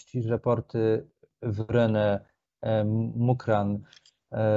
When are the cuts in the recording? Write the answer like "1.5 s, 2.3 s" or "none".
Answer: none